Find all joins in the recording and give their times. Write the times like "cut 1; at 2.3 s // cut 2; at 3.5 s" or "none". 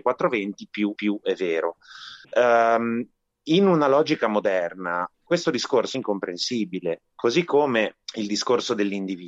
cut 1; at 1.0 s // cut 2; at 2.2 s // cut 3; at 5.1 s // cut 4; at 5.9 s // cut 5; at 8.0 s